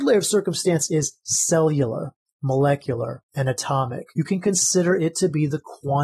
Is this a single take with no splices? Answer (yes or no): yes